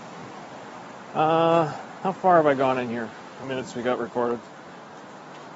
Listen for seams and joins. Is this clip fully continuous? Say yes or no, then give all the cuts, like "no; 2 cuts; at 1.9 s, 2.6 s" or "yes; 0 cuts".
no; 1 cut; at 3.4 s